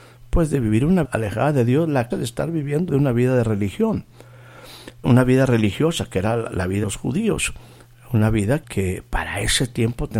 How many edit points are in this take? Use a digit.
6